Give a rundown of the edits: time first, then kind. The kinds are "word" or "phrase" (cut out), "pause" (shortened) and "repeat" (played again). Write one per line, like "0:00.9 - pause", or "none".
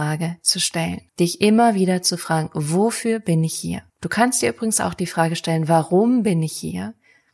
0:01.1 - pause
0:03.9 - pause